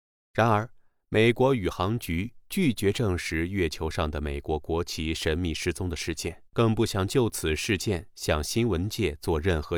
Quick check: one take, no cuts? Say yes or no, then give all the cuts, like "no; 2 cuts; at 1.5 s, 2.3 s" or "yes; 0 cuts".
no; 1 cut; at 6.5 s